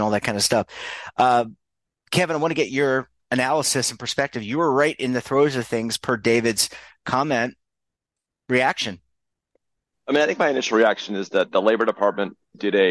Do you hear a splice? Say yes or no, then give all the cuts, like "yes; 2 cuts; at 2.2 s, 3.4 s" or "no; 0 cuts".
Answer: no; 0 cuts